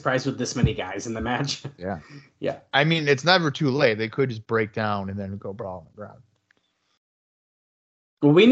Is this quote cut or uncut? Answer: uncut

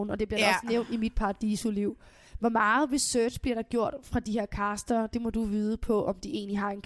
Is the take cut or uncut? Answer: uncut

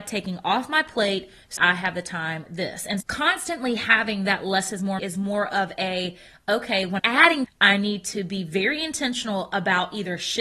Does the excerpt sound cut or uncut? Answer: cut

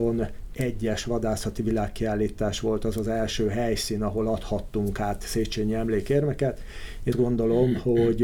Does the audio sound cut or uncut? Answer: cut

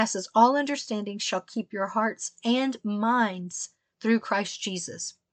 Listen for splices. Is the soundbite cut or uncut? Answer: uncut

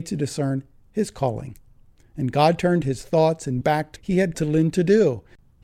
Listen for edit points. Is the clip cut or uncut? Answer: cut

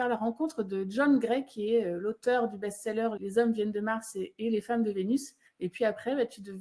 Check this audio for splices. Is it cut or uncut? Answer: cut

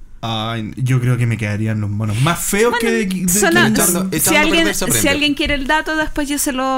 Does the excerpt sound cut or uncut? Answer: uncut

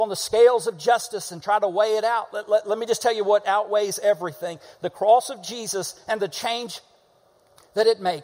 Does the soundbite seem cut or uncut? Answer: uncut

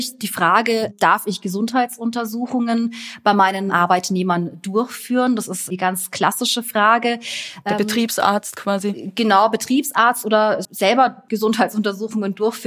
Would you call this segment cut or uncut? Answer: cut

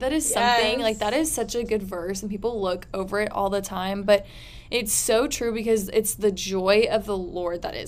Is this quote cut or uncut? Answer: uncut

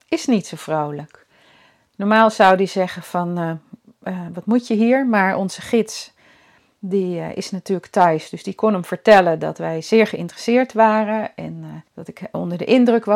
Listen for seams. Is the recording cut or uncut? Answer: cut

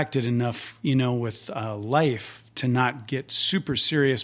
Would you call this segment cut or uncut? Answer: uncut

